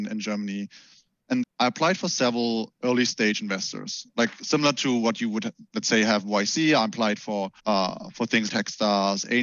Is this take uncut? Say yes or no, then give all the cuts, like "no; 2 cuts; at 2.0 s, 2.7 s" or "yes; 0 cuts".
no; 4 cuts; at 1.4 s, 5.7 s, 7.6 s, 8.5 s